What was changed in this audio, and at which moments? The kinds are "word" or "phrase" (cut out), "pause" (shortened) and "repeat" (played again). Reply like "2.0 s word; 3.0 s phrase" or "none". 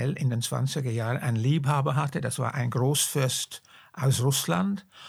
none

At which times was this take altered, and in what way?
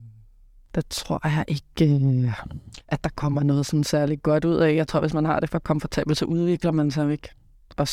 2.8 s pause

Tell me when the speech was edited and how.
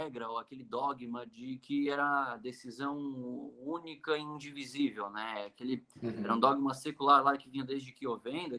none

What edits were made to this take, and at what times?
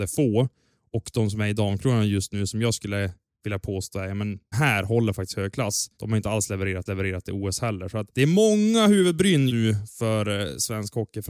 4.5 s word; 5.9 s pause; 6.9 s repeat; 8.1 s pause; 9.5 s word

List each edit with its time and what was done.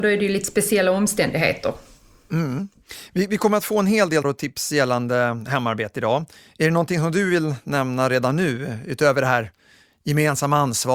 4.2 s word

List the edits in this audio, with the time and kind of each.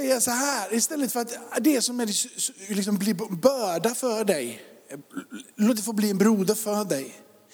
none

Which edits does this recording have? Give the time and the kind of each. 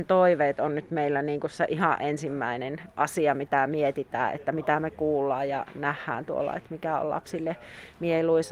none

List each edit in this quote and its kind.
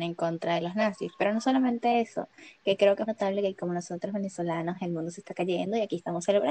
3.1 s word

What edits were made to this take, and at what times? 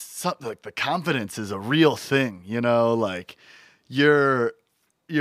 none

